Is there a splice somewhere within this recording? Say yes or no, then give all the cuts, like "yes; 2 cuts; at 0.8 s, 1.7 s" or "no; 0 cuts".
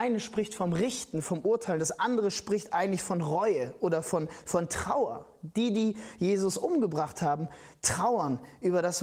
no; 0 cuts